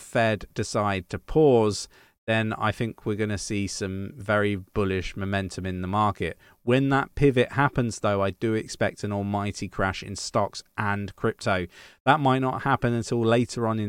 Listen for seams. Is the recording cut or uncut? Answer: uncut